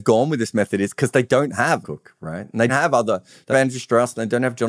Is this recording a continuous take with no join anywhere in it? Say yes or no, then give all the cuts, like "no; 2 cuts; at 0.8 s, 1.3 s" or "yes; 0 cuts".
no; 3 cuts; at 1.8 s, 2.7 s, 3.5 s